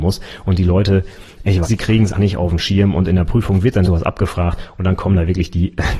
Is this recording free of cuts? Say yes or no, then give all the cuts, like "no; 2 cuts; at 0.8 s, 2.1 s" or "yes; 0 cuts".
no; 3 cuts; at 1.6 s, 2.1 s, 3.8 s